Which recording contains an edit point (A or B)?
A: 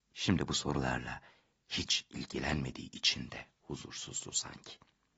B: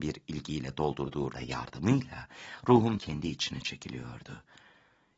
B